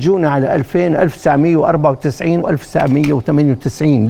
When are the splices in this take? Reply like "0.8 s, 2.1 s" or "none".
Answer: 2.4 s